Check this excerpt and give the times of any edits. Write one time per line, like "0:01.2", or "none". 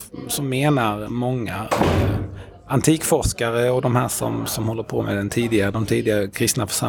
none